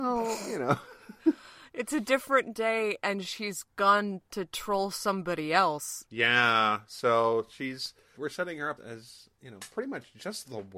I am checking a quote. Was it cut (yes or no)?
yes